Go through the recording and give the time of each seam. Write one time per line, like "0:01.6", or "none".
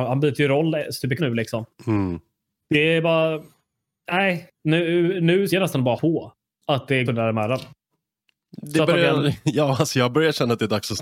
0:01.2
0:04.5
0:05.5
0:06.0
0:07.1

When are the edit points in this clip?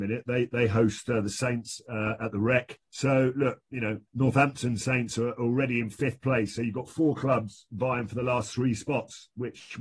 0:02.8
0:04.1

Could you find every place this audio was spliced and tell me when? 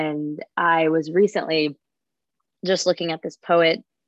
none

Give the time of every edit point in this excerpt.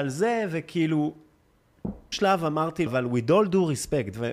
0:02.1
0:02.9

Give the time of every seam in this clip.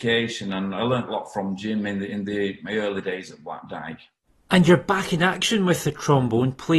0:01.1

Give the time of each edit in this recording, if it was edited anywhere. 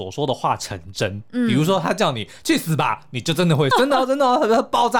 0:03.7

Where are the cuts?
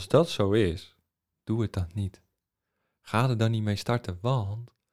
none

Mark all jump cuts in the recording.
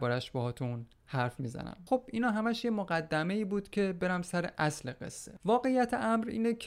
none

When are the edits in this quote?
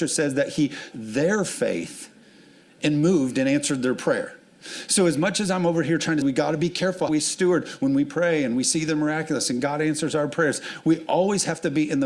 0:00.9
0:06.2
0:07.1

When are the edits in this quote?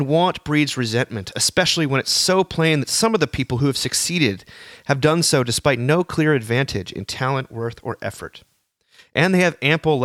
none

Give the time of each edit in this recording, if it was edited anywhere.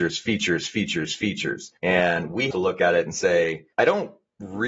0:01.8
0:02.5
0:03.7

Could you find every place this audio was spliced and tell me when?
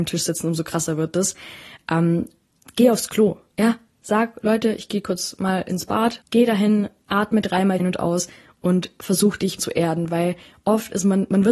0:06.2
0:07.8
0:09.6

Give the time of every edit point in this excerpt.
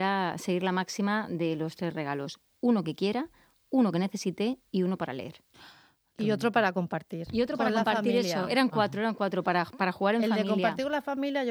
none

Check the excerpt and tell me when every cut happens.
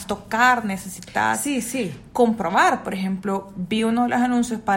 none

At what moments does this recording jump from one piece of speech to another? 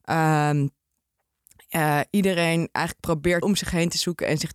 0:03.4

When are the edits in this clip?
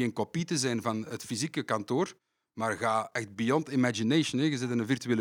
none

